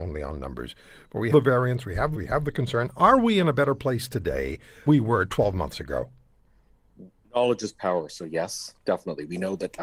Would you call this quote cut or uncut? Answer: cut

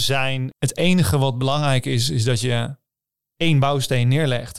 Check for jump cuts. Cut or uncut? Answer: uncut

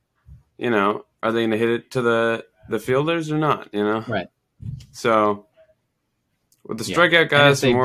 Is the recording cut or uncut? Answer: uncut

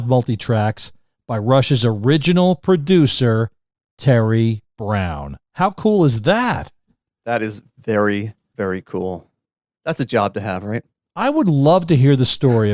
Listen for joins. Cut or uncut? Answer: uncut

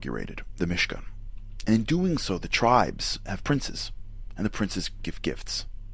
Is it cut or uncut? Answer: uncut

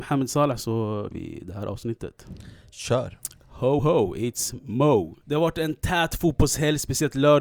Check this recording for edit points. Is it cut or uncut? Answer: cut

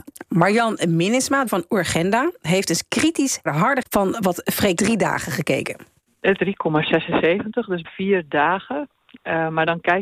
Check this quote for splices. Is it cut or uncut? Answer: cut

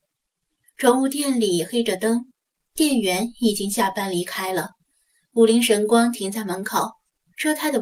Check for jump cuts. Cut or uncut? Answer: uncut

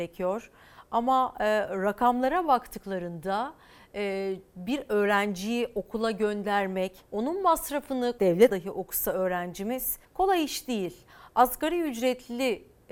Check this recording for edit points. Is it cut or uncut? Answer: cut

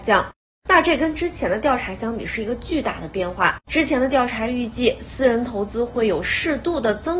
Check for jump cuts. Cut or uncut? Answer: cut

